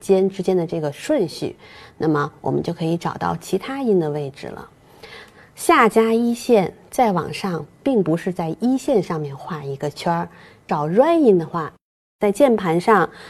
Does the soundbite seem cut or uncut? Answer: uncut